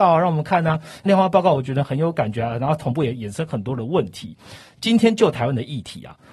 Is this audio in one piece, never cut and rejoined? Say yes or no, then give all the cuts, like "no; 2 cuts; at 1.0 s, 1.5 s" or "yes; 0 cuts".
no; 1 cut; at 1.1 s